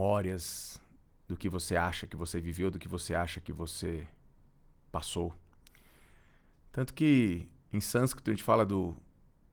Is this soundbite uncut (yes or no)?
yes